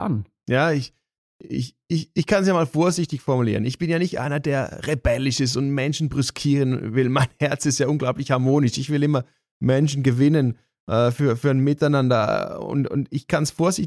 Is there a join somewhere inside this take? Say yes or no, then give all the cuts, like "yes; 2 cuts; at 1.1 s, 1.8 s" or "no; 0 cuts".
no; 0 cuts